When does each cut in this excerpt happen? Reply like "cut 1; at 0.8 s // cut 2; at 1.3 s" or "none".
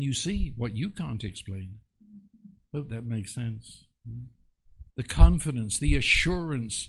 cut 1; at 4.9 s